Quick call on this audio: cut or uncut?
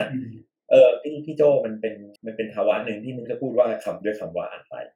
cut